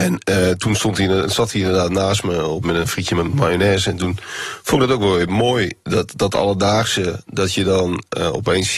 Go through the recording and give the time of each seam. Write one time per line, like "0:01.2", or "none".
0:02.6